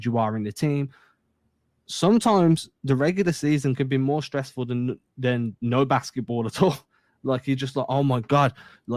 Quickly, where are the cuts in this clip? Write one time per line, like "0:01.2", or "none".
none